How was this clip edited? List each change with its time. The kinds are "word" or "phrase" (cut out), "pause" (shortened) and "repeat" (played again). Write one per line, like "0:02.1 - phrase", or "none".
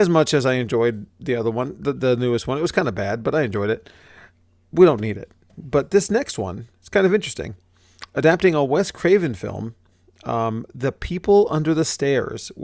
none